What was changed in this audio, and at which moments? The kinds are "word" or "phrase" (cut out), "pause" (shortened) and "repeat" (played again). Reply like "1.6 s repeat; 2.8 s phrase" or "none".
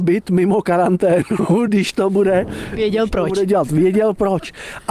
none